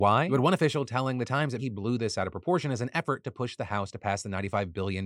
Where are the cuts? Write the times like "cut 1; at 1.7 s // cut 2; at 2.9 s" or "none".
cut 1; at 1.6 s